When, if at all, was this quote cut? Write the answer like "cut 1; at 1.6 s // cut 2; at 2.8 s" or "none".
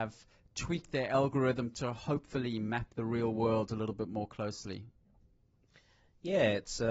none